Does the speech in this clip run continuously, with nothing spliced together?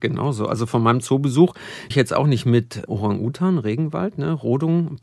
no; 2 cuts; at 1.9 s, 2.9 s

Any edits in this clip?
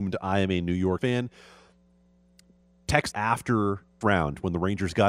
yes; 3 cuts; at 1.0 s, 3.1 s, 4.0 s

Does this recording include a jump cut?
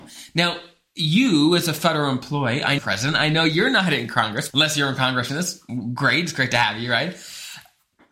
yes; 3 cuts; at 2.8 s, 4.5 s, 5.3 s

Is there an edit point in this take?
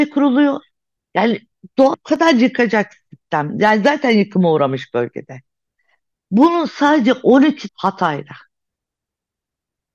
yes; 2 cuts; at 1.9 s, 7.7 s

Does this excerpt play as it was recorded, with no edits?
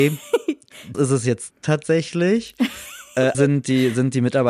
no; 3 cuts; at 0.9 s, 1.5 s, 3.3 s

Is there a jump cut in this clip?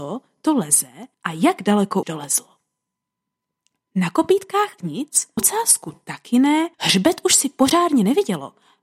yes; 5 cuts; at 1.1 s, 2.0 s, 4.8 s, 5.4 s, 6.7 s

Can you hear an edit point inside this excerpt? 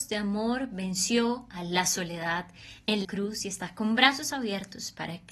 yes; 1 cut; at 3.0 s

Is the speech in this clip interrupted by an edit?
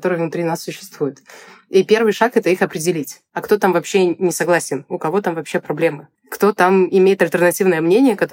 no; 0 cuts

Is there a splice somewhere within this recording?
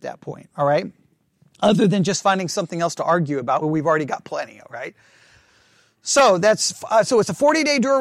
yes; 1 cut; at 3.6 s

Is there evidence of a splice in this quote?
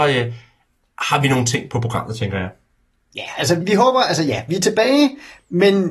yes; 1 cut; at 3.6 s

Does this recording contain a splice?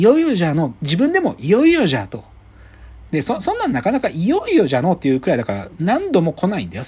no; 0 cuts

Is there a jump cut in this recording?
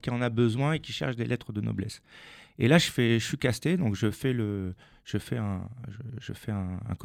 no; 0 cuts

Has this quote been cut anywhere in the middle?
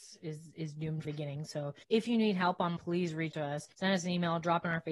yes; 5 cuts; at 1.0 s, 1.8 s, 2.8 s, 3.3 s, 3.7 s

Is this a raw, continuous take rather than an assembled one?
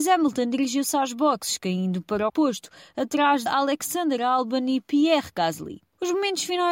no; 2 cuts; at 2.3 s, 3.5 s

